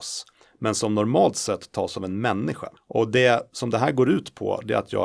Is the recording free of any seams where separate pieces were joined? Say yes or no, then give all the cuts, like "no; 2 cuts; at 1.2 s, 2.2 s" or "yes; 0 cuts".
no; 1 cut; at 2.8 s